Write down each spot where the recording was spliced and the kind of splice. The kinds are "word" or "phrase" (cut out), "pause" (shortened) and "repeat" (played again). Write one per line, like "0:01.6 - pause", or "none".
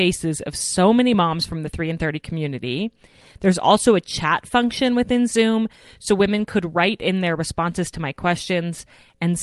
none